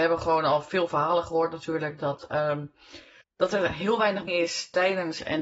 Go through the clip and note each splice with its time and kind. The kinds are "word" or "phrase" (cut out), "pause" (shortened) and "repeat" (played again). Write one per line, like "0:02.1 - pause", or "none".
0:03.2 - pause
0:04.3 - word